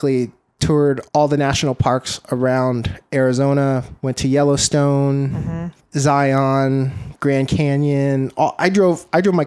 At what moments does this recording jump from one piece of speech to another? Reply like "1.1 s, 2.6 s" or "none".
1.1 s, 4.0 s, 5.8 s